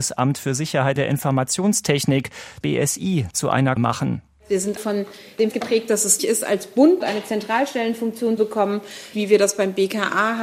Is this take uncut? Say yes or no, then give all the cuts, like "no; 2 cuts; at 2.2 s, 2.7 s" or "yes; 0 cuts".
no; 9 cuts; at 1.0 s, 2.6 s, 3.8 s, 4.8 s, 5.5 s, 6.2 s, 7.0 s, 8.4 s, 9.1 s